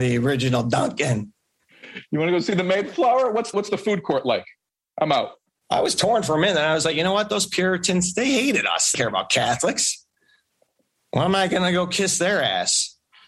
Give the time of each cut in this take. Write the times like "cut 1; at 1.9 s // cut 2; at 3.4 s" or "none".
cut 1; at 3.5 s // cut 2; at 8.9 s